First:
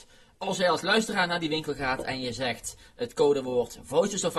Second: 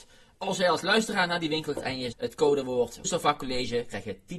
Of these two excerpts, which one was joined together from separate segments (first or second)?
second